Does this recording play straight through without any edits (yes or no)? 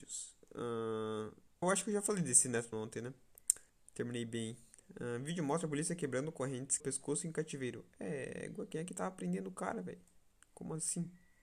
no